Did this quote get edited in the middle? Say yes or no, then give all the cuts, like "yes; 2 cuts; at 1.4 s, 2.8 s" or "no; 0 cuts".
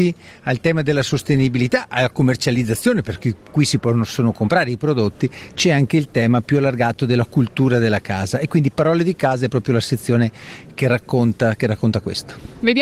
no; 0 cuts